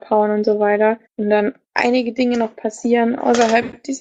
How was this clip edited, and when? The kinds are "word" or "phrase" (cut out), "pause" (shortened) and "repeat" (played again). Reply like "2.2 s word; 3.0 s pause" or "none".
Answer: 1.1 s pause; 1.6 s pause